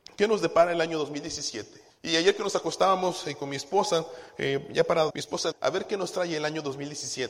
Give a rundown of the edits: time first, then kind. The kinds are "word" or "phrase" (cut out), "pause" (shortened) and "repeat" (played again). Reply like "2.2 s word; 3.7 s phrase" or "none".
1.9 s pause; 5.1 s word; 5.5 s phrase

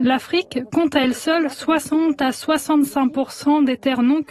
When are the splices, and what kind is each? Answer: none

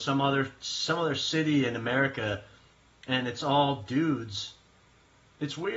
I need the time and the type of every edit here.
none

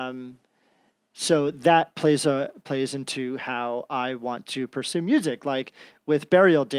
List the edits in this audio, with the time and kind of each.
none

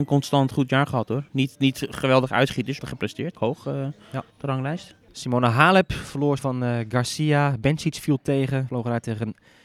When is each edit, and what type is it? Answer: 2.8 s phrase; 3.3 s phrase; 4.3 s pause; 5.0 s pause; 6.4 s word

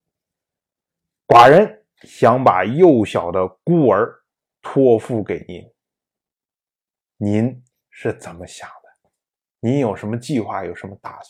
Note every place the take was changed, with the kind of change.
none

